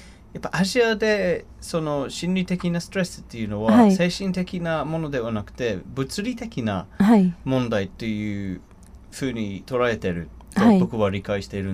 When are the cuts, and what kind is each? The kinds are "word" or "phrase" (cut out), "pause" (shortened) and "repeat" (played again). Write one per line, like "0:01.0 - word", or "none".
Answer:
none

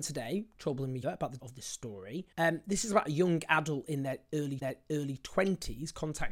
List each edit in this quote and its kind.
0:01.0 - word
0:01.4 - word
0:02.3 - pause
0:04.6 - repeat

